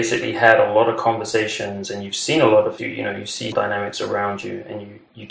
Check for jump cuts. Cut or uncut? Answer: cut